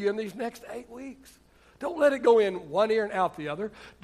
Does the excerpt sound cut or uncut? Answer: uncut